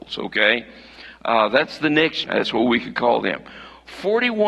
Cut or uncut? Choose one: cut